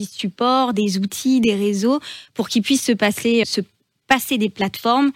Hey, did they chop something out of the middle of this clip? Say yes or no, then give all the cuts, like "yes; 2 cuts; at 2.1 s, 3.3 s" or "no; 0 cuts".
yes; 1 cut; at 3.4 s